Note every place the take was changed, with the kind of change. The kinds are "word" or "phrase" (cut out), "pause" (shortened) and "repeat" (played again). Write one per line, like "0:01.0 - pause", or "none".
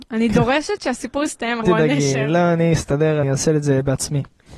0:01.6 - phrase
0:03.2 - word

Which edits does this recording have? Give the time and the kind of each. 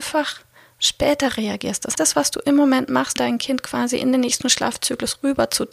0:01.9 - word
0:03.2 - word

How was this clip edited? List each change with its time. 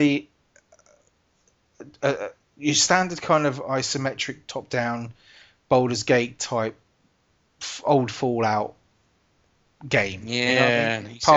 none

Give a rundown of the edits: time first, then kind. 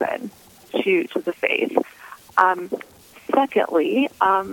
none

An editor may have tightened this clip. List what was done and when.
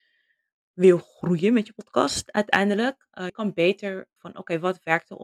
0:03.3 - word
0:04.2 - word

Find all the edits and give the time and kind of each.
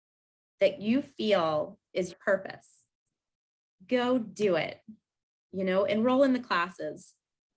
0:02.1 - word

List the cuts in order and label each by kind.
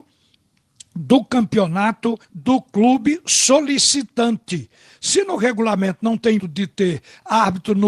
0:02.2 - pause
0:06.4 - word

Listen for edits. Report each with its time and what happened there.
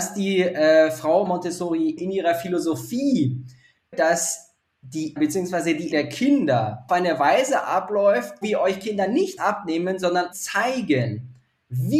0:01.3 - word
0:02.0 - word
0:03.9 - word
0:05.2 - word
0:05.9 - word
0:06.9 - word
0:08.4 - word
0:09.4 - word
0:10.3 - word

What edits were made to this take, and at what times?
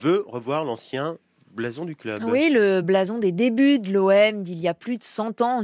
none

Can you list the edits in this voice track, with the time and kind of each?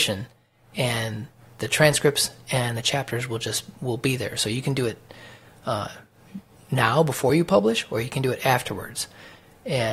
none

